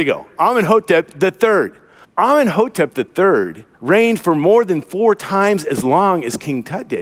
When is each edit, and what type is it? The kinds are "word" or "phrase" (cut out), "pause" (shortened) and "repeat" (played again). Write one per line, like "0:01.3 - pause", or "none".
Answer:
0:02.0 - pause
0:03.7 - pause